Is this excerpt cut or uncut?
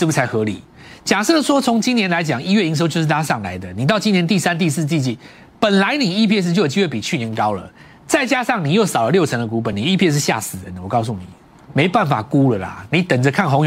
uncut